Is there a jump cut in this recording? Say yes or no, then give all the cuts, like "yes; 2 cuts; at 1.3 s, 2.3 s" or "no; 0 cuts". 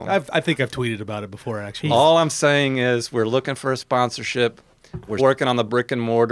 yes; 1 cut; at 5.2 s